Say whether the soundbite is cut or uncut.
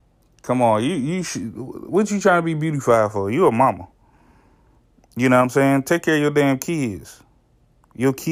uncut